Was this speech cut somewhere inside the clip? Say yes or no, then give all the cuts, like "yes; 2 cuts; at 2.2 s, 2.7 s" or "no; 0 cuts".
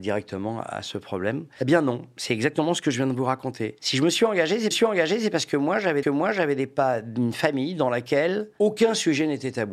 yes; 2 cuts; at 4.7 s, 6.0 s